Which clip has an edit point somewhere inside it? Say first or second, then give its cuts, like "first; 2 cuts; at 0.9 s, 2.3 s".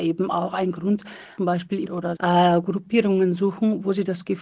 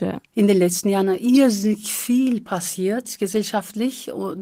first; 3 cuts; at 1.4 s, 1.9 s, 2.2 s